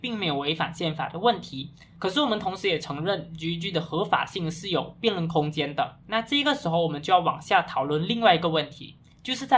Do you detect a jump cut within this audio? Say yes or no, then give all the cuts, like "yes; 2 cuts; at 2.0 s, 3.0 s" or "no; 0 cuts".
yes; 1 cut; at 1.9 s